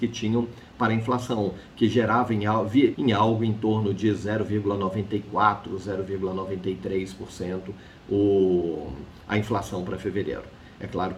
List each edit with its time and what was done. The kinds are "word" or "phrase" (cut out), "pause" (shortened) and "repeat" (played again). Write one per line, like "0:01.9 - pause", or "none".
0:02.9 - word